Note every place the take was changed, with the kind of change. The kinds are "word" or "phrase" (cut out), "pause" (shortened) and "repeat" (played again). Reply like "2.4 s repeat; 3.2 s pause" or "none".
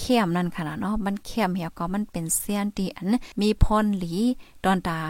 3.3 s pause

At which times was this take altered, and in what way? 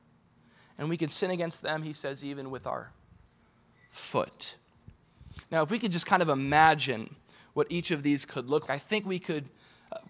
8.7 s word

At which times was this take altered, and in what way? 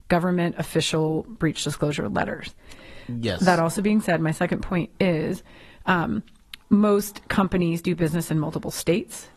6.6 s pause

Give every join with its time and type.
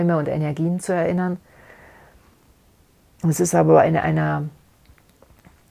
none

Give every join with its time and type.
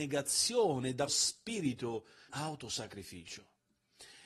1.1 s word; 2.3 s word

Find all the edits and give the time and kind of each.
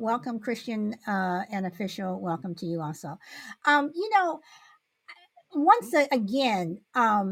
none

